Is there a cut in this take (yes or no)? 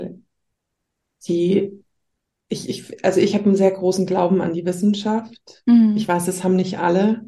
no